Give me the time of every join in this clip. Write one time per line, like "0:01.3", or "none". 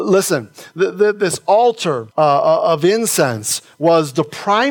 0:02.1